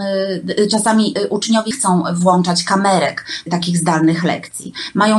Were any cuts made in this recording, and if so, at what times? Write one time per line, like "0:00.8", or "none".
0:01.7
0:03.5